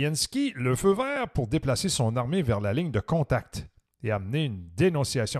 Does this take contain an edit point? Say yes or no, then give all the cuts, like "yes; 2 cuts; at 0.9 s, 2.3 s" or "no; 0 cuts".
no; 0 cuts